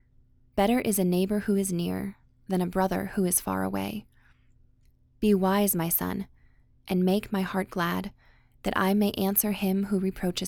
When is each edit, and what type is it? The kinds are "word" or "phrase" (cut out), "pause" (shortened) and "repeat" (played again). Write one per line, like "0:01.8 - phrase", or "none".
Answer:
none

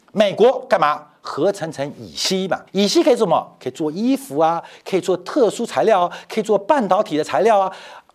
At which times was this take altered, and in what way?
0:02.7 - pause

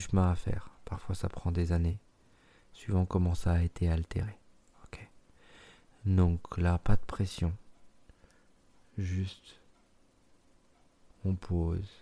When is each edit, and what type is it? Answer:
none

